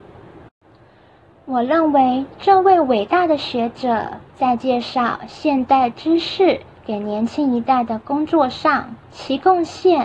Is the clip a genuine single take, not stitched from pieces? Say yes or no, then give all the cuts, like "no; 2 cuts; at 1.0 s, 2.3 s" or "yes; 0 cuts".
no; 2 cuts; at 4.3 s, 9.0 s